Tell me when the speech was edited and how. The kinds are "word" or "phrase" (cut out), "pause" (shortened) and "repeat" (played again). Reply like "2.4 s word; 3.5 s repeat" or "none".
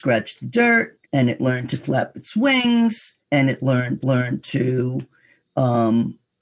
1.0 s pause; 3.2 s pause; 4.0 s repeat